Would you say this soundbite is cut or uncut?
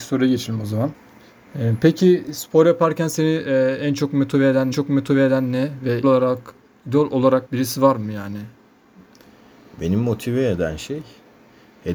cut